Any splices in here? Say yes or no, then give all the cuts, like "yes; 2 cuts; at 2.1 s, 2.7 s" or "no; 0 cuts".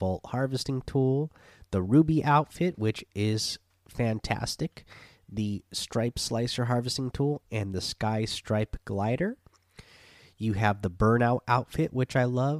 no; 0 cuts